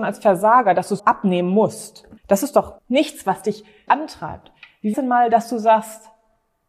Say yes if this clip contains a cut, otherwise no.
yes